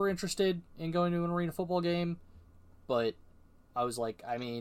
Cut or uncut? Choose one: uncut